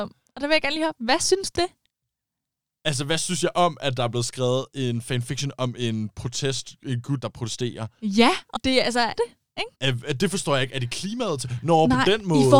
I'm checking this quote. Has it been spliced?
yes; 5 cuts; at 1.5 s, 7.2 s, 8.5 s, 9.2 s, 9.7 s

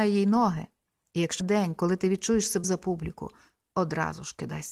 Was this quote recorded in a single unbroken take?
no; 2 cuts; at 1.4 s, 2.6 s

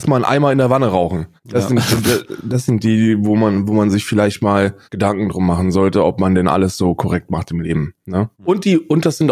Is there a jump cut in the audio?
yes; 3 cuts; at 1.4 s, 4.8 s, 8.3 s

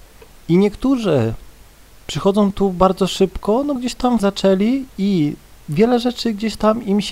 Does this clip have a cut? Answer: yes; 3 cuts; at 1.6 s, 3.8 s, 4.2 s

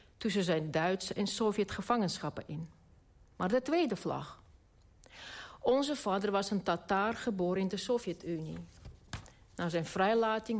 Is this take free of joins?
yes; 0 cuts

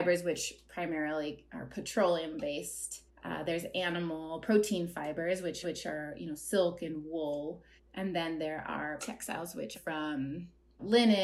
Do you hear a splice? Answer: yes; 5 cuts; at 3.1 s, 5.6 s, 7.8 s, 9.0 s, 9.7 s

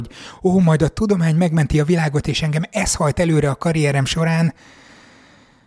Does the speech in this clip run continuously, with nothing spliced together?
yes; 0 cuts

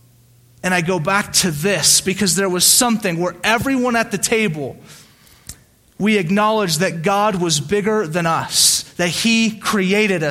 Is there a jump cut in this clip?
yes; 1 cut; at 5.8 s

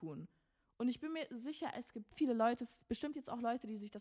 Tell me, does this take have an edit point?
yes; 1 cut; at 2.1 s

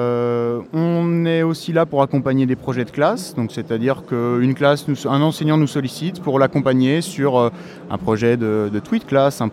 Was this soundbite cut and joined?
no; 0 cuts

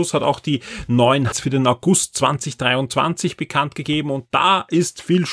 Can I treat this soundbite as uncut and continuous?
no; 1 cut; at 1.3 s

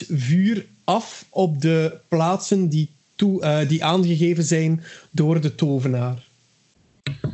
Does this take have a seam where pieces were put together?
no; 0 cuts

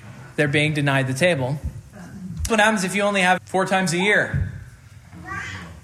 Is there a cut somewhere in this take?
yes; 2 cuts; at 2.5 s, 3.4 s

